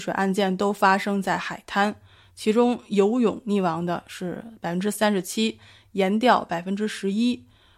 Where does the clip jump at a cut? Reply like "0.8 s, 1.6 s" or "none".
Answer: none